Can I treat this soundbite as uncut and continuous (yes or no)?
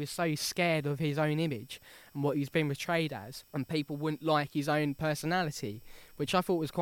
no